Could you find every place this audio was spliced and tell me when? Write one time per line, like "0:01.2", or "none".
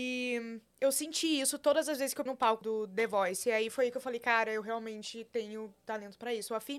0:02.3
0:02.6